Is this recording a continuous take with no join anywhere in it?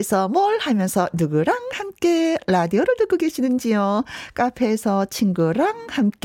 yes; 0 cuts

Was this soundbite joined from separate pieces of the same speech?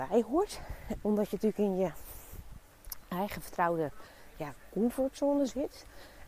yes; 1 cut; at 1.0 s

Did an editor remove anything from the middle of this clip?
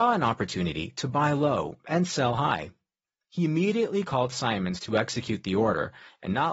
no; 0 cuts

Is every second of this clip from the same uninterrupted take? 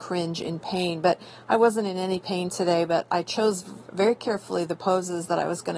yes; 0 cuts

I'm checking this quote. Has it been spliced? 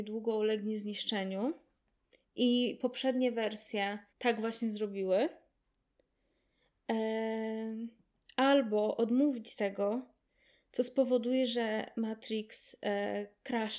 yes; 1 cut; at 4.1 s

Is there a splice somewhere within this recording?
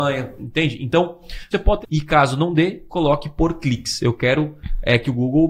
yes; 2 cuts; at 1.5 s, 1.8 s

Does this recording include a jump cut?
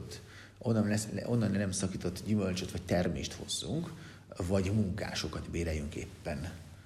no; 0 cuts

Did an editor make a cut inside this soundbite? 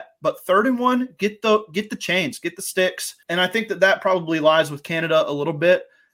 yes; 1 cut; at 3.2 s

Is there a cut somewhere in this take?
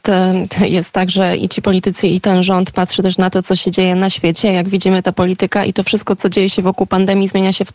no; 0 cuts

